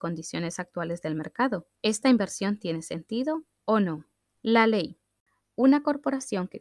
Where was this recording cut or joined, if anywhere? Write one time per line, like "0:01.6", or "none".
0:01.8
0:04.2